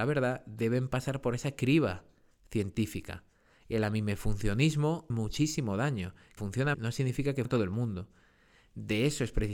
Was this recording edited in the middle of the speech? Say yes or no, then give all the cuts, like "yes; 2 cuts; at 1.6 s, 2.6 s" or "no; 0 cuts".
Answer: yes; 4 cuts; at 5.1 s, 6.4 s, 6.7 s, 7.5 s